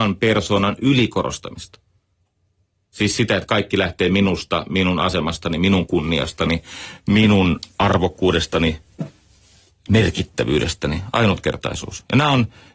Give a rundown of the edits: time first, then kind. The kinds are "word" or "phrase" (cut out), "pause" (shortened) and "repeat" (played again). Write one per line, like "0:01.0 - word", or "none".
none